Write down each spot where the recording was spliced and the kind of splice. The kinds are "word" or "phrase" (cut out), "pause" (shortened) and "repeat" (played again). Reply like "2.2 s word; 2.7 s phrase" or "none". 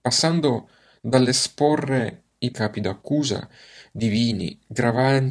2.5 s word